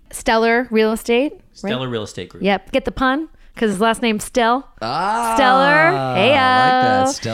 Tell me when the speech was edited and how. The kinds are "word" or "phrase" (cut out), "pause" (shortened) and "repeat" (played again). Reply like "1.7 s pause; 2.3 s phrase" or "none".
none